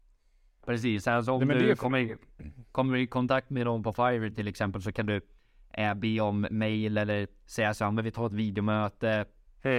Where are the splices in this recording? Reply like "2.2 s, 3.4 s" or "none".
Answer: none